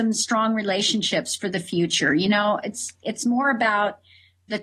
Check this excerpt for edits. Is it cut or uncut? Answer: uncut